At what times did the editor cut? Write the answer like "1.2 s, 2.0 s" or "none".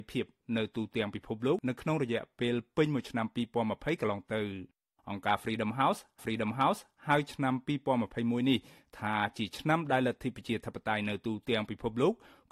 6.2 s